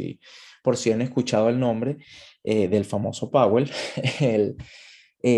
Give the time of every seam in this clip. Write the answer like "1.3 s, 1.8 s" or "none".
none